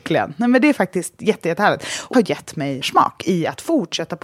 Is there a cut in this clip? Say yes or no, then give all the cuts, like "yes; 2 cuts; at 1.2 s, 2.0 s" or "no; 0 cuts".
yes; 2 cuts; at 2.1 s, 2.8 s